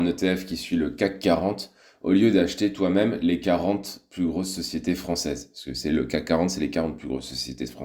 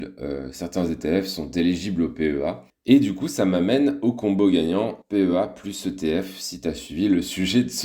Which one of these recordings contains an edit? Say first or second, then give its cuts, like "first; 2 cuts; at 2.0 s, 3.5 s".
second; 2 cuts; at 2.7 s, 5.0 s